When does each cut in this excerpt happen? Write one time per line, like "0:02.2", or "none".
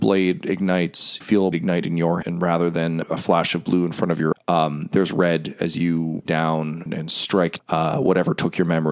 0:01.2
0:01.5
0:02.2
0:03.0
0:04.3
0:06.3
0:06.9
0:07.6